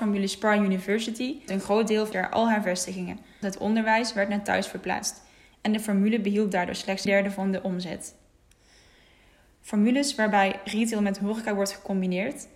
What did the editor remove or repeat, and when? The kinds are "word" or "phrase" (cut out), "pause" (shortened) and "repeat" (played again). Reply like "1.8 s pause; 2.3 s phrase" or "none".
1.5 s word; 2.1 s word; 3.4 s word; 7.1 s word